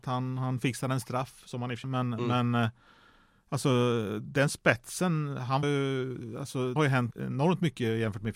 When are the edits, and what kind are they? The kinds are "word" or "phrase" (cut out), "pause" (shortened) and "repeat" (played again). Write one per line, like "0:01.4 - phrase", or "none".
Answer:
0:01.8 - word
0:05.6 - word
0:06.8 - word
0:07.1 - word